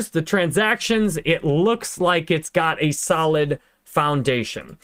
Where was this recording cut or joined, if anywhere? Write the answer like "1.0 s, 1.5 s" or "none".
none